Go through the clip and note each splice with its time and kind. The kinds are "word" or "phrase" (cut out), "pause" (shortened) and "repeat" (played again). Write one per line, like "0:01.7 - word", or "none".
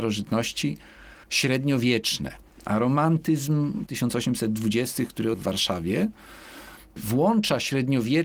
0:01.2 - pause
0:03.9 - phrase
0:05.3 - word